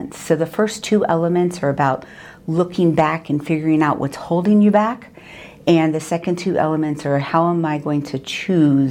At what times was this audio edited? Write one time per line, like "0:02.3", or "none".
none